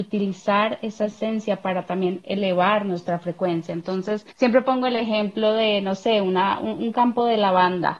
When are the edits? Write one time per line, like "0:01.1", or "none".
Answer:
0:04.3